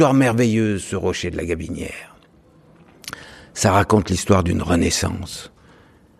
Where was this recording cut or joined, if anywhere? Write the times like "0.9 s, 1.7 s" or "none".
none